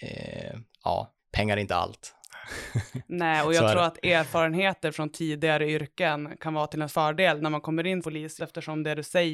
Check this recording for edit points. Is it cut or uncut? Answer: cut